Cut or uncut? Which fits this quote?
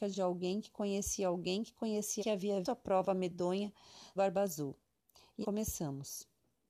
cut